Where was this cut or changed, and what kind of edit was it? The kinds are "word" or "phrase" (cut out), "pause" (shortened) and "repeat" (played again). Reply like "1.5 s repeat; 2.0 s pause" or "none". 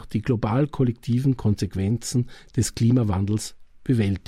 none